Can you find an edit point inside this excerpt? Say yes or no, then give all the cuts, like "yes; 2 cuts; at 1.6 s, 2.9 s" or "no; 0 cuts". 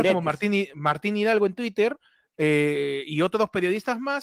no; 0 cuts